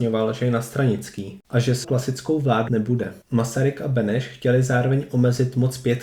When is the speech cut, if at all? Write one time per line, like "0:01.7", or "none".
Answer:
0:01.4
0:01.8
0:02.7
0:03.2